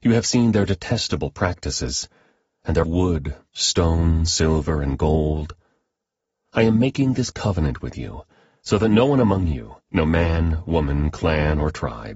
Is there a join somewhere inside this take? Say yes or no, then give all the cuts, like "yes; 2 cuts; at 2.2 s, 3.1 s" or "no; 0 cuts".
yes; 2 cuts; at 2.8 s, 9.8 s